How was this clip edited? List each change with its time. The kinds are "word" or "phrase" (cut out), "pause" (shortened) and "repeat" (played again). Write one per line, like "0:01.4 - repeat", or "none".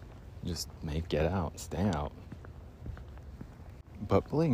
0:01.1 - word